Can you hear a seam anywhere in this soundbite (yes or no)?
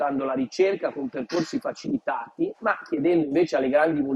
no